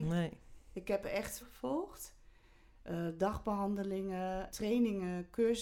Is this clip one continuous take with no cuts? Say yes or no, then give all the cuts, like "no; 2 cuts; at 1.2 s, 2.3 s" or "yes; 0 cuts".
no; 2 cuts; at 1.4 s, 4.5 s